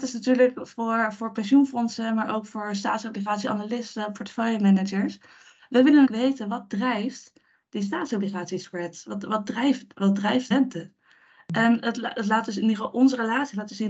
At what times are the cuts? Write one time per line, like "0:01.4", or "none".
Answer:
0:06.1
0:10.5